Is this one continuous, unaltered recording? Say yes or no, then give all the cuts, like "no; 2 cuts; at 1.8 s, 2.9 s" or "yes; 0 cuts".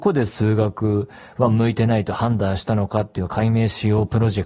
yes; 0 cuts